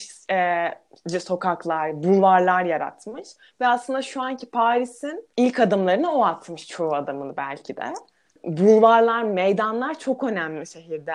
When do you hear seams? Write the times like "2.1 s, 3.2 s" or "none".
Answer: 8.3 s